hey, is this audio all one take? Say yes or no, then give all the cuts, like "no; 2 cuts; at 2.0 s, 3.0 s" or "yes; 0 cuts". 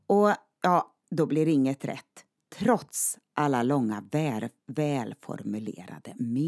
yes; 0 cuts